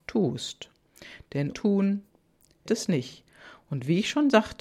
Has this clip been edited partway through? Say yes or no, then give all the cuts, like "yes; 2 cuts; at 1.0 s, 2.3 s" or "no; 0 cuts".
yes; 2 cuts; at 1.5 s, 2.7 s